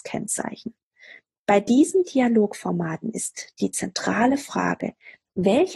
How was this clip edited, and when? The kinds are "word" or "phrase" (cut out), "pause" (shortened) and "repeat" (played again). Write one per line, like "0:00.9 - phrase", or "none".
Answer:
none